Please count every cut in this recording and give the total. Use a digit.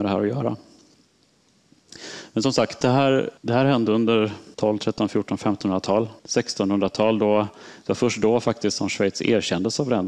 3